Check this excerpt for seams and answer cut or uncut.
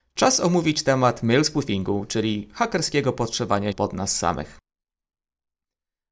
cut